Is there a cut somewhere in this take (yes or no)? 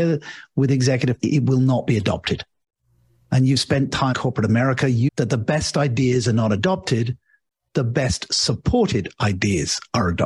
yes